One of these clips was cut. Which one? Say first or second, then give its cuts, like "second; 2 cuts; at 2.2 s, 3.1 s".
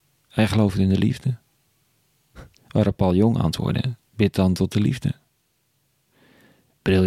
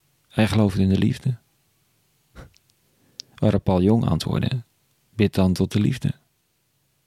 first; 2 cuts; at 2.6 s, 4.1 s